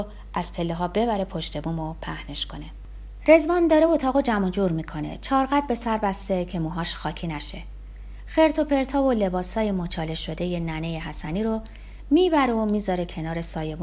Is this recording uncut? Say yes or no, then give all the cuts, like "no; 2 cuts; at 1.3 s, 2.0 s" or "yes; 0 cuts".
yes; 0 cuts